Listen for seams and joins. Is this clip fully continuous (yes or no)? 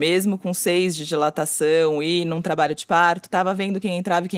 yes